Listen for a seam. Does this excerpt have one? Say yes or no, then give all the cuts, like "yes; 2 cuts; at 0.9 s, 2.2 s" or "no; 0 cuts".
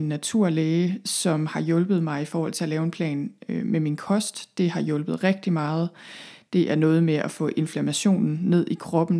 no; 0 cuts